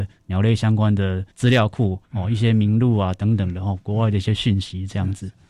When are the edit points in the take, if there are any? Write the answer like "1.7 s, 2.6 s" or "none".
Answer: 1.3 s